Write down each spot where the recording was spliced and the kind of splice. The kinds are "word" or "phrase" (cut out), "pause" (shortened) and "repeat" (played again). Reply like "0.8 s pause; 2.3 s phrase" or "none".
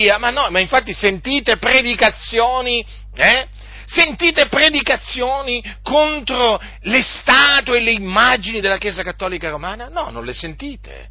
none